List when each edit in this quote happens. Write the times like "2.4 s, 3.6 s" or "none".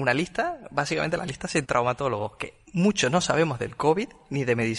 1.6 s